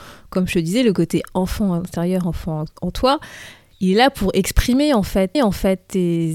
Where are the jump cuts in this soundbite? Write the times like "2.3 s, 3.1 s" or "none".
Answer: 5.3 s